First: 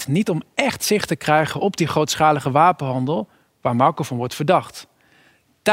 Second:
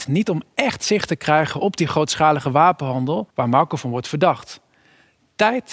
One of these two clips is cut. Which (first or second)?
second